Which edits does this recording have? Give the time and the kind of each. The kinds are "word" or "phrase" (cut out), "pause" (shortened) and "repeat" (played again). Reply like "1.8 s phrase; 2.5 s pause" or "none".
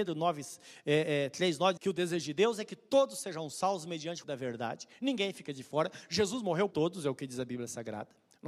1.8 s word; 4.2 s word; 6.7 s word